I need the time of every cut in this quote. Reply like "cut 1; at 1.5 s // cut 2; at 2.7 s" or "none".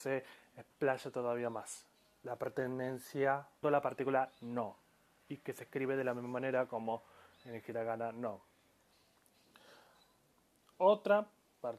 cut 1; at 3.6 s

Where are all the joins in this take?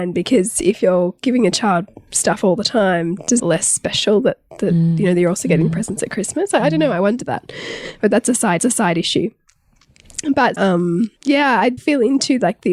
cut 1; at 3.4 s // cut 2; at 8.6 s // cut 3; at 10.6 s // cut 4; at 11.2 s // cut 5; at 11.8 s

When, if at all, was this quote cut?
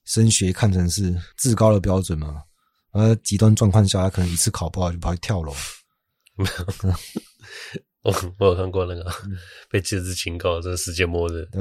none

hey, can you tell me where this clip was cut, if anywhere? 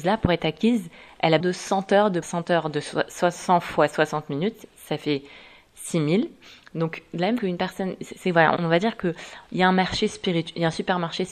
cut 1; at 1.4 s // cut 2; at 2.2 s // cut 3; at 7.4 s // cut 4; at 8.6 s

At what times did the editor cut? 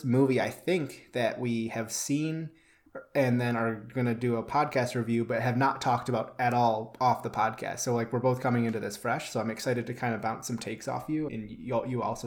cut 1; at 11.3 s

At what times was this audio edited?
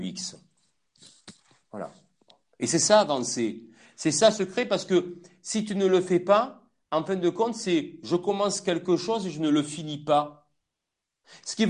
none

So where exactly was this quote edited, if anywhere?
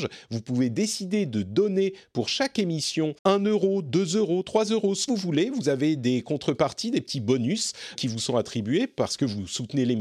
cut 1; at 3.2 s // cut 2; at 5.1 s // cut 3; at 8.0 s

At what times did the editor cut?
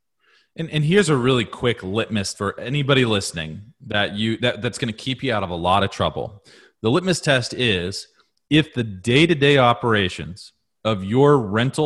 cut 1; at 2.3 s

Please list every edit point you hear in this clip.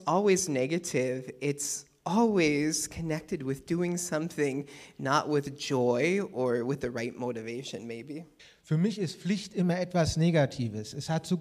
cut 1; at 8.4 s

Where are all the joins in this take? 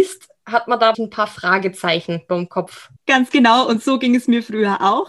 cut 1; at 0.9 s // cut 2; at 2.3 s // cut 3; at 3.0 s

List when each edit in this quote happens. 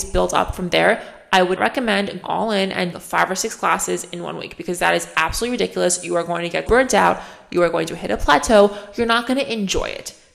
cut 1; at 1.6 s // cut 2; at 2.2 s // cut 3; at 2.9 s // cut 4; at 6.7 s

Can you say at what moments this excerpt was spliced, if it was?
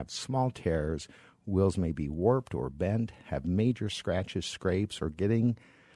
none

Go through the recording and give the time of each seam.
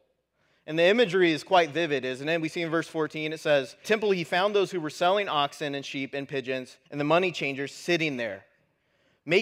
cut 1; at 3.8 s // cut 2; at 6.9 s

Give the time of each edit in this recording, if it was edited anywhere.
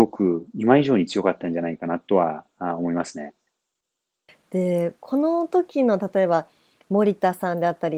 none

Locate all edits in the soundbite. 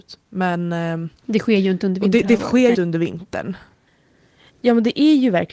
cut 1; at 1.2 s // cut 2; at 2.7 s

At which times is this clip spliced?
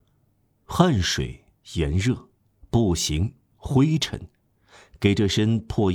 none

